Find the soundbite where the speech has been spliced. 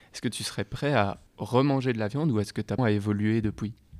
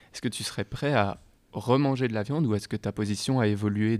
first; 2 cuts; at 1.3 s, 2.8 s

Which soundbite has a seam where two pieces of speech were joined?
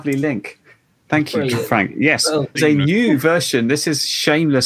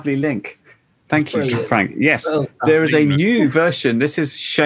first; 1 cut; at 2.5 s

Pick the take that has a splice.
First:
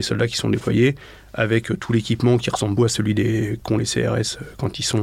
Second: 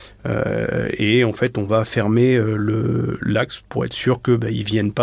first; 1 cut; at 2.8 s

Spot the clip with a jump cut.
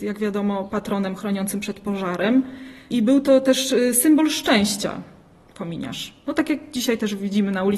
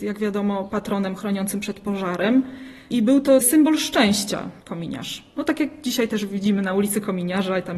second; 2 cuts; at 3.4 s, 4.6 s

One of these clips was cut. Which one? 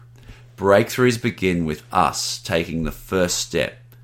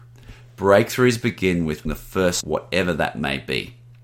second; 2 cuts; at 1.9 s, 2.4 s

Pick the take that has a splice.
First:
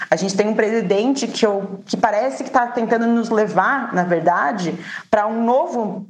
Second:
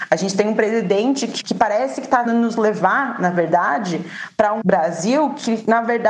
second; 3 cuts; at 1.4 s, 2.3 s, 4.6 s

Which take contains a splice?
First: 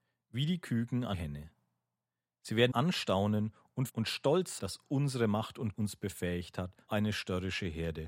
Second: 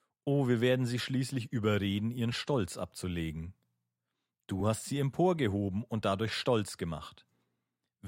first; 6 cuts; at 1.1 s, 2.7 s, 3.9 s, 4.6 s, 5.7 s, 6.9 s

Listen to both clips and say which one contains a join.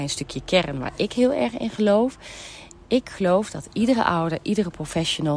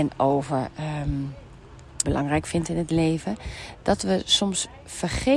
second; 1 cut; at 2.0 s

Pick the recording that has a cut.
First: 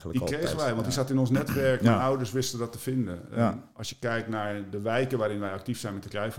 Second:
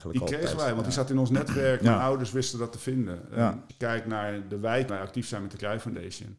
second; 2 cuts; at 3.7 s, 4.9 s

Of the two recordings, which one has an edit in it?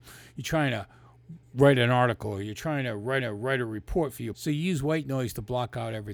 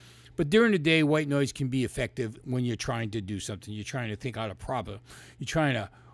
first; 3 cuts; at 1.4 s, 3.2 s, 4.3 s

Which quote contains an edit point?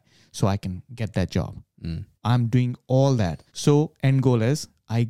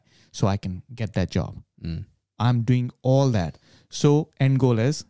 first; 2 cuts; at 2.2 s, 3.5 s

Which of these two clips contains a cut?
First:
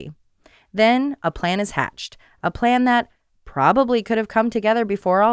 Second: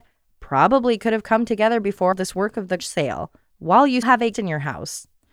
second; 4 cuts; at 2.1 s, 2.8 s, 4.0 s, 4.3 s

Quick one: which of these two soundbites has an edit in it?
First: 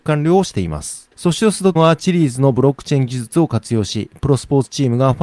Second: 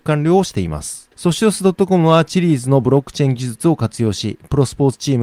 first; 1 cut; at 1.8 s

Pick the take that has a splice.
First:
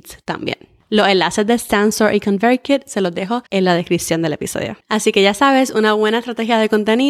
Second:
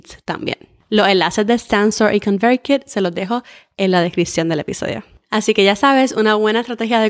first; 2 cuts; at 3.5 s, 4.8 s

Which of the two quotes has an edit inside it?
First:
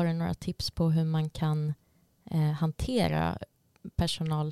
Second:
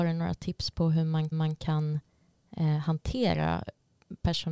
second; 1 cut; at 1.3 s

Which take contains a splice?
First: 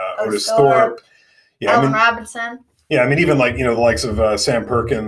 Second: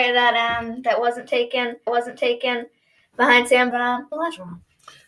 second; 3 cuts; at 1.9 s, 3.7 s, 4.1 s

